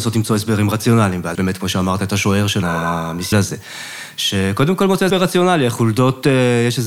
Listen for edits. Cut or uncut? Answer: cut